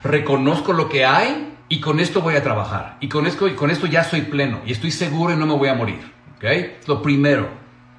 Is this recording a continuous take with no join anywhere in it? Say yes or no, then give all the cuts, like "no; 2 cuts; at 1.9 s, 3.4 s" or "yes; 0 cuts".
no; 1 cut; at 1.6 s